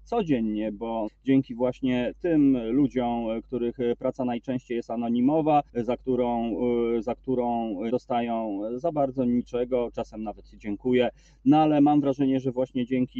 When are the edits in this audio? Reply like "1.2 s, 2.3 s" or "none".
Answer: 1.1 s, 5.7 s, 7.9 s